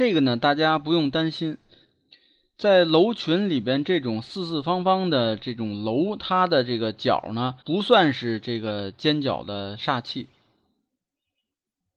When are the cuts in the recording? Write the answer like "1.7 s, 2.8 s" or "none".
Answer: 7.6 s